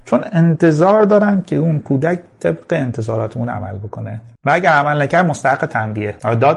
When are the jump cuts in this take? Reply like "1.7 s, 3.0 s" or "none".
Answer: none